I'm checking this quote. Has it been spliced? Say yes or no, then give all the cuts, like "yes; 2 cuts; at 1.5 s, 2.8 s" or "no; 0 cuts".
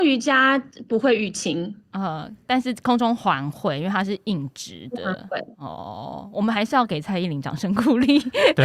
yes; 1 cut; at 1.8 s